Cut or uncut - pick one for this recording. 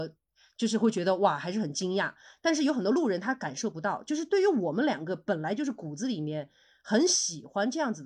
uncut